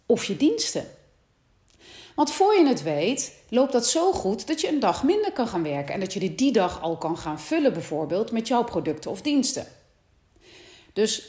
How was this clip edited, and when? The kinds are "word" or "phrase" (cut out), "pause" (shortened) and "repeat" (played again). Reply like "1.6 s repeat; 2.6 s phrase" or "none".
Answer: none